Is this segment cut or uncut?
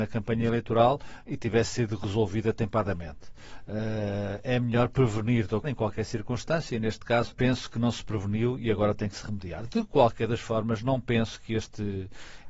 cut